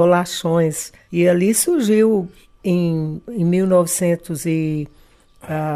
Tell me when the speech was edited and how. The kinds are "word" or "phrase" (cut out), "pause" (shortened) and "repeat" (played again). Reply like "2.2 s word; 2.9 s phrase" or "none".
none